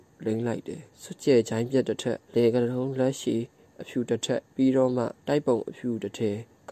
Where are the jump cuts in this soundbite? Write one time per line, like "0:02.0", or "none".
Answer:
0:00.9
0:02.2
0:04.5
0:05.2